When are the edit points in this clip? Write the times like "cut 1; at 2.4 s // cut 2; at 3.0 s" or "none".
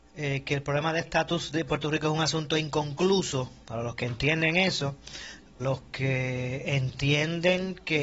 cut 1; at 5.6 s